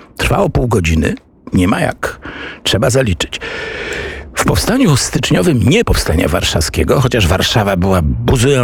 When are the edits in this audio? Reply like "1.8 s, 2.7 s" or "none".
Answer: 5.8 s